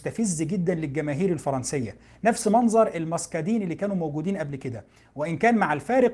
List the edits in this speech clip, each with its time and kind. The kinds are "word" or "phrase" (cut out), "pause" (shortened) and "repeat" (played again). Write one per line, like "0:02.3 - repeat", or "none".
none